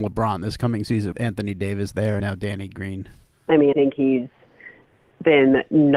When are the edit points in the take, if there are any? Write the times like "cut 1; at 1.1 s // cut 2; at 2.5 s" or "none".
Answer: cut 1; at 1.1 s // cut 2; at 2.2 s // cut 3; at 3.3 s // cut 4; at 3.7 s